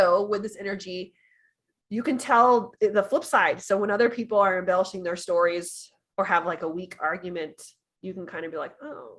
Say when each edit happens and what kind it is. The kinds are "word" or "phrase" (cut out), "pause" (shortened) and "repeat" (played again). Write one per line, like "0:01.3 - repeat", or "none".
none